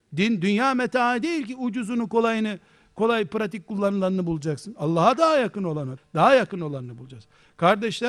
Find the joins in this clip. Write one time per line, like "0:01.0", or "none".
0:06.0